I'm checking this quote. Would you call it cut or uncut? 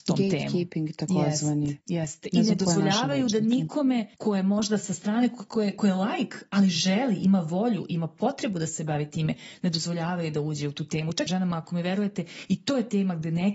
cut